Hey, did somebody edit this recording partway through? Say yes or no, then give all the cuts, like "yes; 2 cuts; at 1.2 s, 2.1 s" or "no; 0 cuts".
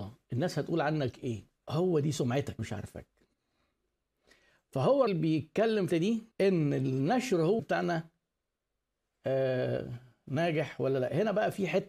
yes; 6 cuts; at 1.6 s, 2.6 s, 5.1 s, 5.9 s, 6.3 s, 7.6 s